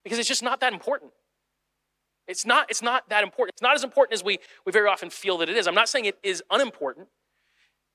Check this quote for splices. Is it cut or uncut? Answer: uncut